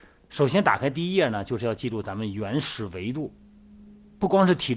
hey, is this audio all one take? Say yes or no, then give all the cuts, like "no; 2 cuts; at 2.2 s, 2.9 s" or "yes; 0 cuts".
yes; 0 cuts